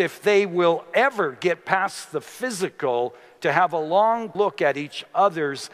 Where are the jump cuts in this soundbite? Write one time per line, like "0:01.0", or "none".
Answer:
0:04.3